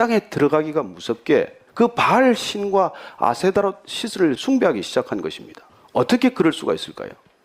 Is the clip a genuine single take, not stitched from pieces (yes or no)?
no